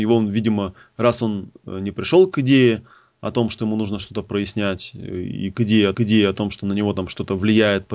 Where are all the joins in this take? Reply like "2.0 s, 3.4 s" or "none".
5.9 s